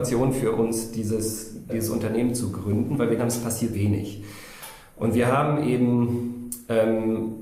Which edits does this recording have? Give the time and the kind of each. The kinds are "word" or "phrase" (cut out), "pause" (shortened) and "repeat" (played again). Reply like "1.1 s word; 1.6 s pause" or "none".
1.7 s word; 3.2 s word; 3.7 s word